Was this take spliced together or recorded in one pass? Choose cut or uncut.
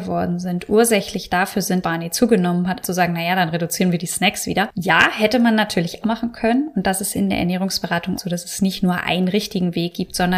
cut